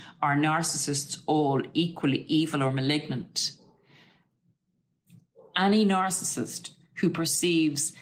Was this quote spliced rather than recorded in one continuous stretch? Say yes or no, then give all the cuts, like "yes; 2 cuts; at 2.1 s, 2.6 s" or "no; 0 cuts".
no; 0 cuts